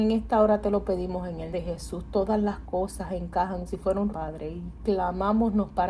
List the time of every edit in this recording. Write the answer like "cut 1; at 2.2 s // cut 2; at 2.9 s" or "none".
cut 1; at 1.5 s // cut 2; at 3.7 s // cut 3; at 4.1 s